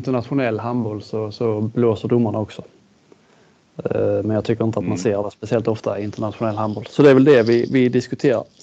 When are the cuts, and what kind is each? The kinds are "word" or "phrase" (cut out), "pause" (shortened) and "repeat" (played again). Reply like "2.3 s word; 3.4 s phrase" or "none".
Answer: none